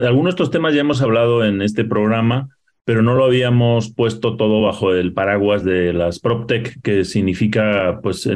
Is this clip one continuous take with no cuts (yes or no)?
yes